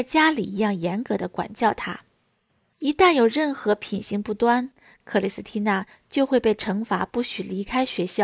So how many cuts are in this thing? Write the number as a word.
zero